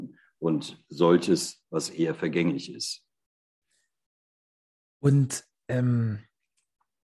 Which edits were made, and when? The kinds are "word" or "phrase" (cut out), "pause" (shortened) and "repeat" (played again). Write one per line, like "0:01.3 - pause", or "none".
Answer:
0:01.6 - word